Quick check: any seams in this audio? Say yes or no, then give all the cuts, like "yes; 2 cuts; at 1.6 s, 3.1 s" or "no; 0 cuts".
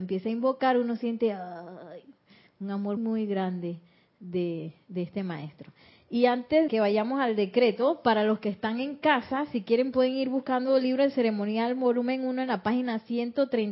yes; 2 cuts; at 3.0 s, 6.7 s